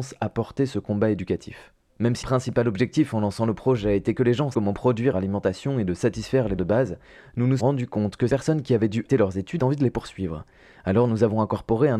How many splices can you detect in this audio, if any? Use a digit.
8